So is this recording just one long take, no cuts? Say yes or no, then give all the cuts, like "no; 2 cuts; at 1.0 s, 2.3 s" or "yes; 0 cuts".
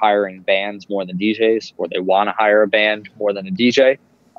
yes; 0 cuts